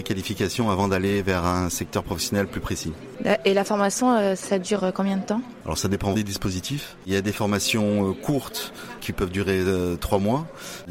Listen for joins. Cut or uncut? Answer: cut